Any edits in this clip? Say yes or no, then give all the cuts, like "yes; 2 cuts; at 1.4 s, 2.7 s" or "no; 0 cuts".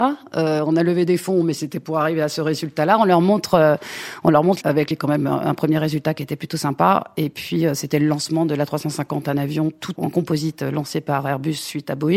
yes; 3 cuts; at 4.6 s, 4.9 s, 10.0 s